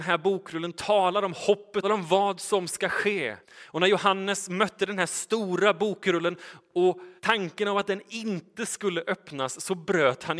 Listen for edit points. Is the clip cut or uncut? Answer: cut